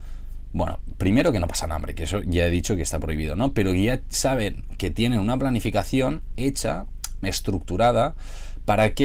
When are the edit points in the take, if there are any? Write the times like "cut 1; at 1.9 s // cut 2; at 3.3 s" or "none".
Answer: cut 1; at 7.2 s